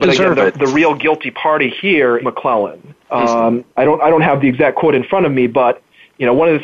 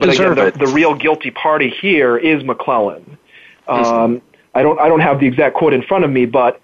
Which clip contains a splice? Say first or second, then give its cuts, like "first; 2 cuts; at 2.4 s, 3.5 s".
first; 3 cuts; at 2.2 s, 3.0 s, 3.7 s